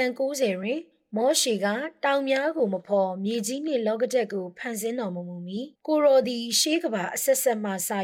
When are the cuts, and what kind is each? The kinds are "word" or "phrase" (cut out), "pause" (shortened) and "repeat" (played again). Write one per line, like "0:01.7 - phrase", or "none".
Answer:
0:05.7 - pause